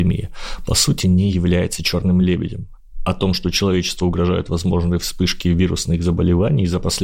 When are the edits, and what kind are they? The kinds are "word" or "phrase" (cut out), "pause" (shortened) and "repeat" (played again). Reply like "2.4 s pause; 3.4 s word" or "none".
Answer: none

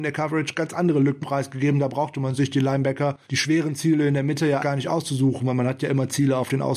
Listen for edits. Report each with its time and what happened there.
1.2 s word; 3.2 s pause; 4.6 s word

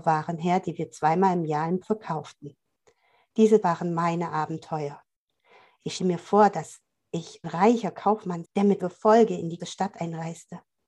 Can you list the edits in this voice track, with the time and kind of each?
1.8 s word; 3.6 s word; 6.0 s word; 7.4 s word; 8.4 s word; 8.8 s word; 9.6 s word

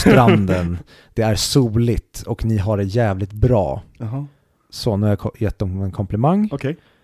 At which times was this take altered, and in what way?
none

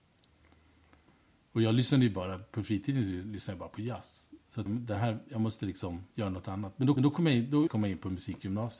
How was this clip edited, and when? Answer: 4.7 s word; 6.1 s pause; 7.0 s repeat; 7.7 s word

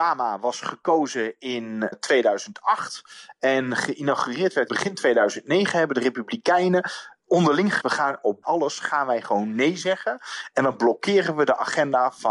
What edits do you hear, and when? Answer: 1.9 s word; 4.7 s word; 7.8 s word; 8.4 s word

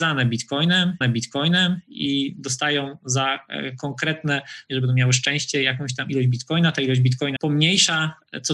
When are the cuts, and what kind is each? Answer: 1.0 s repeat; 4.7 s phrase; 7.4 s word

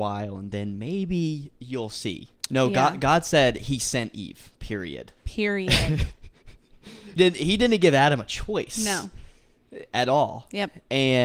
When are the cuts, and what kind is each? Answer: 2.4 s pause; 5.2 s pause; 7.2 s word

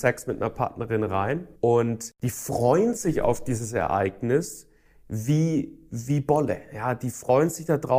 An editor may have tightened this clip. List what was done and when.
1.6 s pause

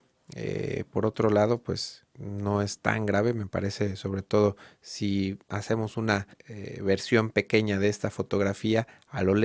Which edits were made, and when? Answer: 2.1 s pause; 5.4 s pause; 6.3 s pause

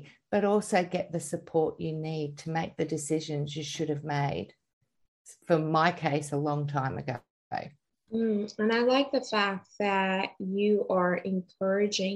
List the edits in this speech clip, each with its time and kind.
7.9 s pause

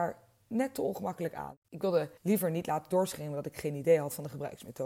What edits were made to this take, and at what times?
1.6 s pause; 2.2 s pause

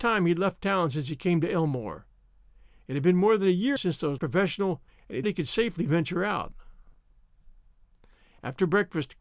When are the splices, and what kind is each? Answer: 3.8 s word; 4.2 s word; 4.9 s word; 5.2 s word

